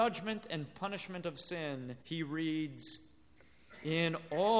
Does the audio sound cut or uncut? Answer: cut